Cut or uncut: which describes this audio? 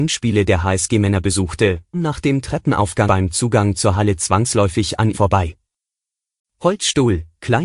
cut